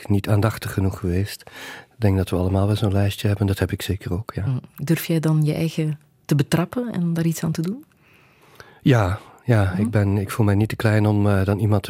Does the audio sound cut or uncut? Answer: uncut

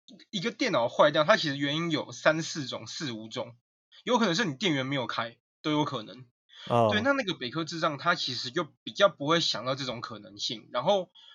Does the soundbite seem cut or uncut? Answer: uncut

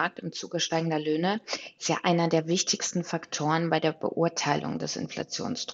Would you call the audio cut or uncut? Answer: uncut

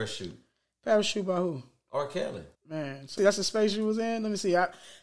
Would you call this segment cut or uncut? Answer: cut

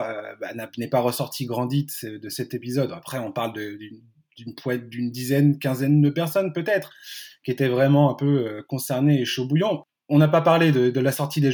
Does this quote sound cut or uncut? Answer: uncut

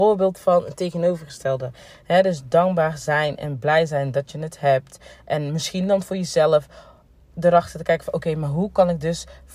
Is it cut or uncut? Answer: uncut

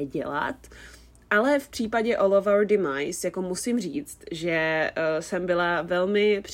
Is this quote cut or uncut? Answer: uncut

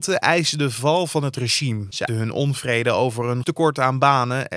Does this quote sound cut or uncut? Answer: cut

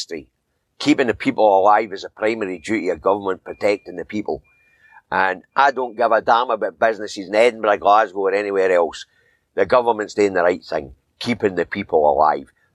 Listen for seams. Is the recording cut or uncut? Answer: uncut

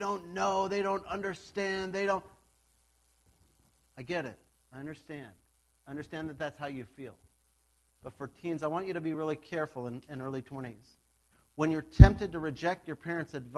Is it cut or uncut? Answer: uncut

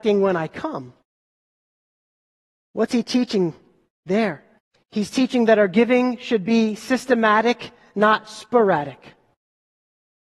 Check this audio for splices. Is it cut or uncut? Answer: cut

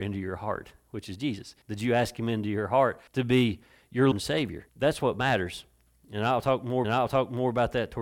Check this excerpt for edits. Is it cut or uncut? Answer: cut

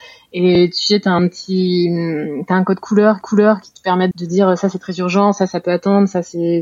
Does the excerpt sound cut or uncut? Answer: cut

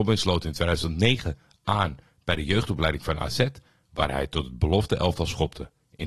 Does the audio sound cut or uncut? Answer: uncut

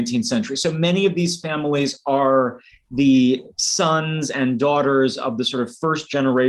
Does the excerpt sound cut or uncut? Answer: uncut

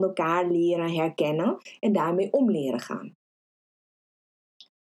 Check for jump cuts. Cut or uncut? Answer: uncut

